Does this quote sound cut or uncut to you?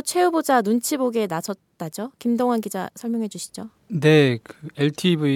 uncut